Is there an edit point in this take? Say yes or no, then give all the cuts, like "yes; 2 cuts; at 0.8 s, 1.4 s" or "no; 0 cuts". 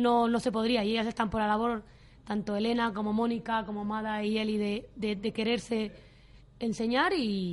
no; 0 cuts